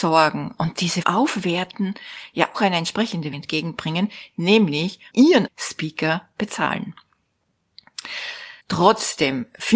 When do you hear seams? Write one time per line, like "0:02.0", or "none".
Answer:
0:01.0
0:02.5
0:03.3
0:05.1
0:05.5
0:08.6